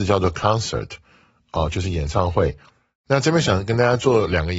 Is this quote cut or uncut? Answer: uncut